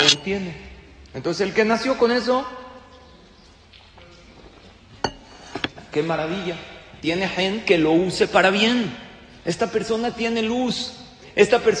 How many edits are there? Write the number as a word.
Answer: zero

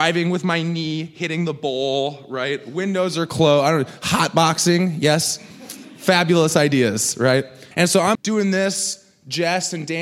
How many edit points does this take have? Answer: two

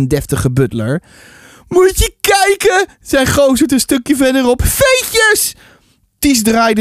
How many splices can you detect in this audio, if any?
zero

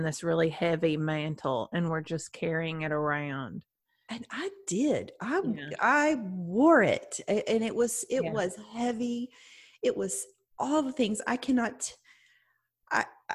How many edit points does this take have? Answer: zero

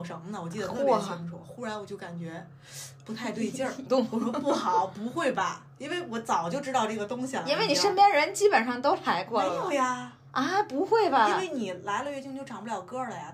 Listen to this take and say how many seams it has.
one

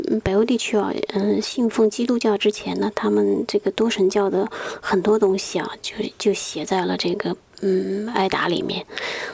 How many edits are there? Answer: zero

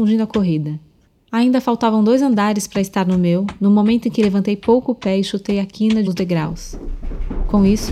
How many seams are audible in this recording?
one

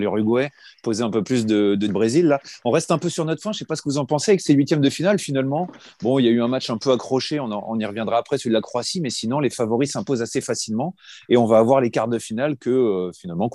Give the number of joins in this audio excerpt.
one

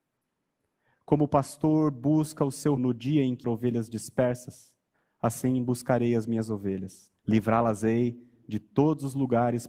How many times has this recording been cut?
four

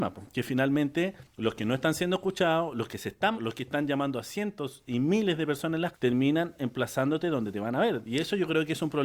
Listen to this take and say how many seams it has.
two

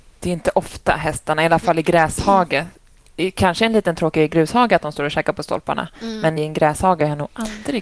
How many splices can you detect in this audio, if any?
one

